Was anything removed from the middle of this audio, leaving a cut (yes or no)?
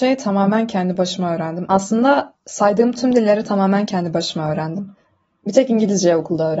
no